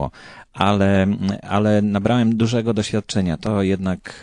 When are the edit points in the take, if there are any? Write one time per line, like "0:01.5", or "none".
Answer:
none

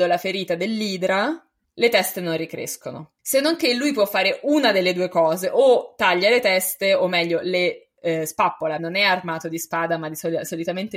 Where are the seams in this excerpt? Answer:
0:01.6
0:03.2
0:08.8

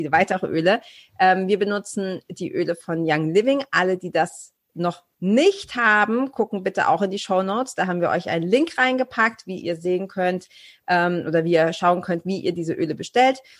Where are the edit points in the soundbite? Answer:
none

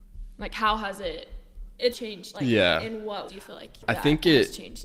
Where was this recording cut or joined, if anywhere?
0:01.9
0:02.3
0:03.3

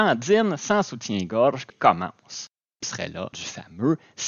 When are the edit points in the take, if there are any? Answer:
0:01.7
0:02.8
0:03.3

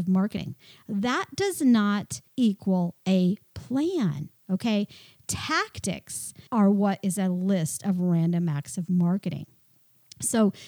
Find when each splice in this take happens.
0:02.3
0:06.5

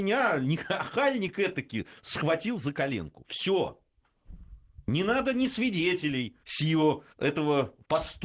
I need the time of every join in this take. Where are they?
0:06.4
0:07.1

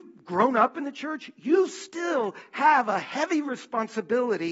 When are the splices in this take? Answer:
none

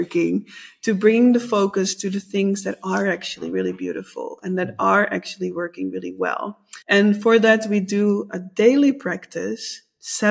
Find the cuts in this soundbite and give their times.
0:06.8

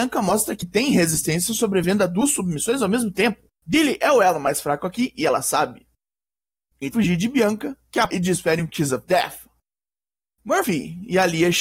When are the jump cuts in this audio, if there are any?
0:03.6
0:06.9
0:08.1

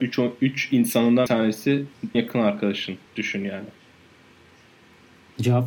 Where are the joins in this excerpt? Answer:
0:01.3
0:02.1
0:03.1

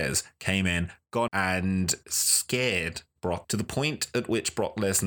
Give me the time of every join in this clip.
0:01.3
0:02.0
0:03.4

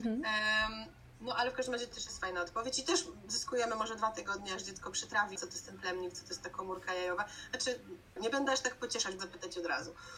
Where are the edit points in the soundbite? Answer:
0:01.9
0:05.4
0:08.2
0:09.2

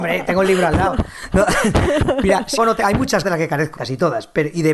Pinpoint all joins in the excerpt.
0:02.6
0:03.2
0:03.8

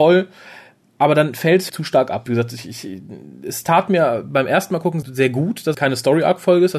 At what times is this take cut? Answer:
0:01.7
0:05.0
0:05.7

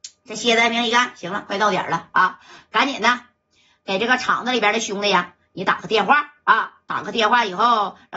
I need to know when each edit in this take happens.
none

